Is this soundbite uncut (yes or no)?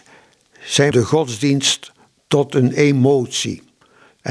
no